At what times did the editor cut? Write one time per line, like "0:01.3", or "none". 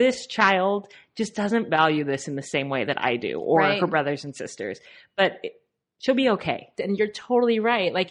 none